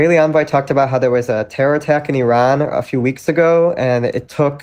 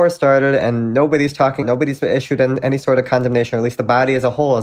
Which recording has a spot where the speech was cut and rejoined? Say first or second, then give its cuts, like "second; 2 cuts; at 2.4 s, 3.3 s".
second; 1 cut; at 1.6 s